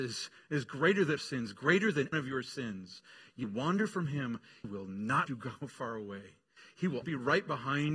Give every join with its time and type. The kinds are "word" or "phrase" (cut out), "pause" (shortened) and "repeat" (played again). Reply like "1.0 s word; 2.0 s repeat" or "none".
1.2 s phrase; 2.1 s phrase; 3.4 s word; 4.6 s word; 5.3 s word; 7.0 s word